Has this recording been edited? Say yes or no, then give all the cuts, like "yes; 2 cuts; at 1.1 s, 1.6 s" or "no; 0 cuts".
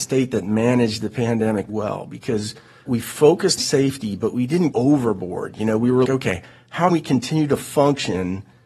yes; 6 cuts; at 1.7 s, 2.8 s, 3.6 s, 4.7 s, 6.0 s, 6.9 s